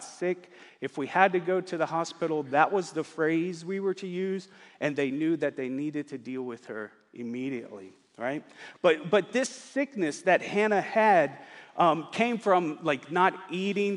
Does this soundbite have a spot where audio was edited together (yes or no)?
no